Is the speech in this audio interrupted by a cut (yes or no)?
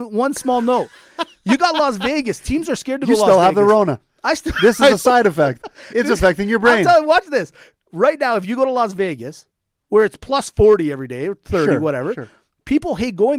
no